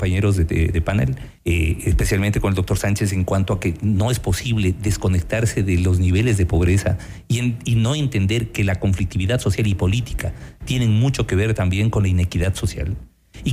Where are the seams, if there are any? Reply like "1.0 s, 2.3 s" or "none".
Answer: 1.4 s